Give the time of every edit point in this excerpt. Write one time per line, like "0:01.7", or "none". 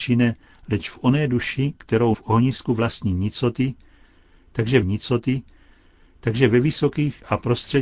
0:02.1
0:04.8